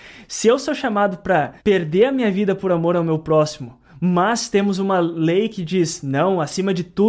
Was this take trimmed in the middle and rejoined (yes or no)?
yes